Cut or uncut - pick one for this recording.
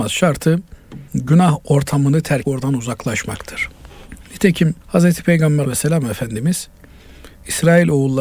cut